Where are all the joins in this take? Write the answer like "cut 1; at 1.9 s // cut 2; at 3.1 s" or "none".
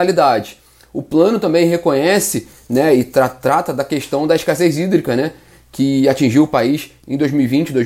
none